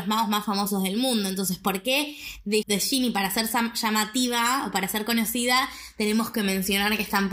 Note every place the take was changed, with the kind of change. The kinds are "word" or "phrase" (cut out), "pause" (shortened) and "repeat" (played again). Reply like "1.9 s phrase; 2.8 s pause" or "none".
2.6 s word

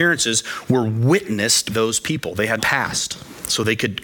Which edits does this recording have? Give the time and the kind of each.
1.7 s word; 2.6 s word

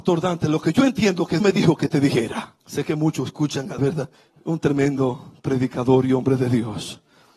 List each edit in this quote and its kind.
1.4 s word; 2.6 s pause; 3.8 s word; 4.1 s pause

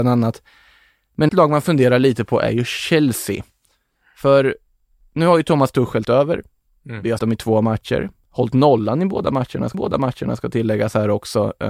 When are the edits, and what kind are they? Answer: 1.3 s word; 6.0 s word; 7.2 s word; 9.7 s repeat

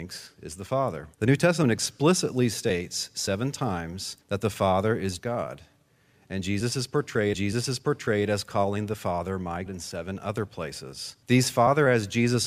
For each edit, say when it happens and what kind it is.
1.1 s pause; 4.2 s pause; 5.2 s word; 7.3 s repeat; 9.7 s word; 11.2 s pause

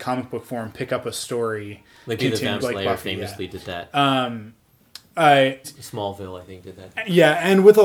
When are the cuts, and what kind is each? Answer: 2.2 s word; 2.6 s word; 5.6 s word; 6.9 s word

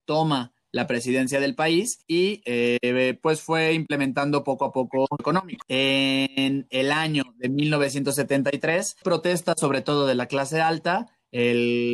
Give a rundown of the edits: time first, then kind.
5.2 s phrase; 9.0 s phrase

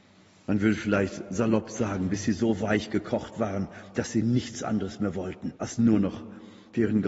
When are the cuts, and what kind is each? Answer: 5.6 s pause

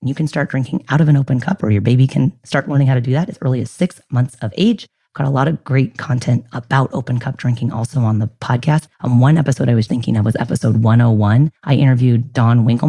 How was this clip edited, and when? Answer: 8.9 s pause; 9.9 s word; 11.6 s pause

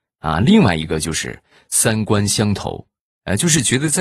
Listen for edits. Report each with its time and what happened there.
none

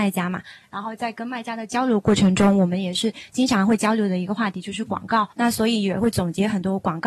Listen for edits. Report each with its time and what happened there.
5.3 s pause

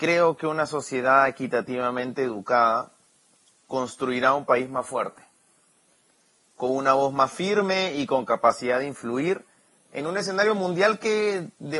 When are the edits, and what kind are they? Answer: none

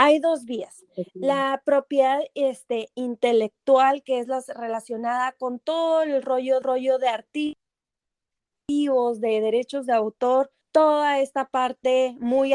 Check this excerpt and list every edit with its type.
6.6 s repeat; 10.6 s pause

